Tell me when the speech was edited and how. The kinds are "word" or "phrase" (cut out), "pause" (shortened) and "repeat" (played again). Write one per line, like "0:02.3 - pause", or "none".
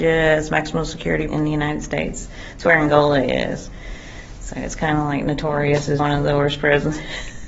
0:01.3 - word
0:06.0 - word